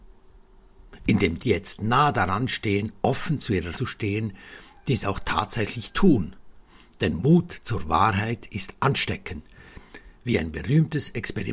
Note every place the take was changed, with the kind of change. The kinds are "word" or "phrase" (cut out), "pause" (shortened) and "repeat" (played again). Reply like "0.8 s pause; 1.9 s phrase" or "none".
1.4 s phrase; 3.7 s word